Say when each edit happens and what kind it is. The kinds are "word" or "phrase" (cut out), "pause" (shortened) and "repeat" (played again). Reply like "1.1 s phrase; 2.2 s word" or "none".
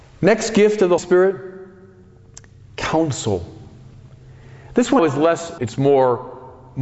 1.0 s word; 5.0 s word; 5.6 s word